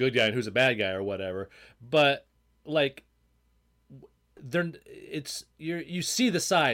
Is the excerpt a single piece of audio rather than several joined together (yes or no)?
yes